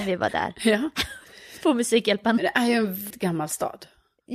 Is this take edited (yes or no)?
yes